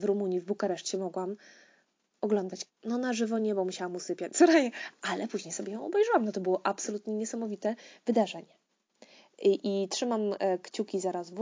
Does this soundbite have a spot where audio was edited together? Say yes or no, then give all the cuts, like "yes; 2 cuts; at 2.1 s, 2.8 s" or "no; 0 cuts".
yes; 1 cut; at 2.7 s